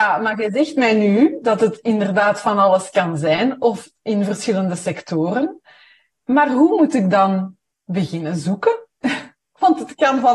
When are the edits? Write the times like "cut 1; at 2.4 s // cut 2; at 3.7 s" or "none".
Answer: none

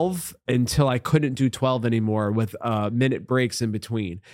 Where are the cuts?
none

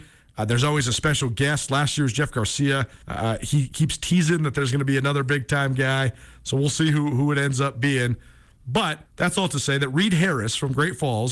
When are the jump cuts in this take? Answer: cut 1; at 3.0 s // cut 2; at 9.1 s

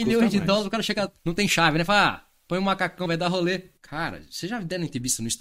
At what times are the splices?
cut 1; at 1.2 s // cut 2; at 3.1 s // cut 3; at 3.8 s

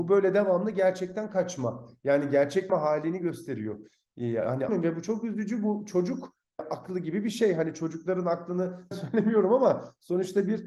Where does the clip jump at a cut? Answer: cut 1; at 2.7 s // cut 2; at 4.7 s // cut 3; at 6.6 s // cut 4; at 8.9 s

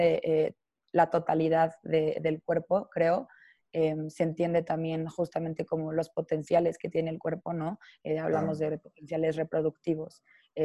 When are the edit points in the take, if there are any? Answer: none

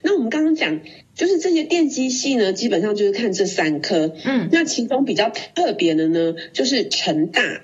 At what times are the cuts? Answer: cut 1; at 1.0 s

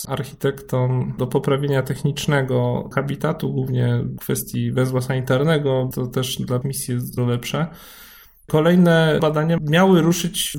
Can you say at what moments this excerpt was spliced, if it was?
cut 1; at 6.6 s // cut 2; at 7.2 s

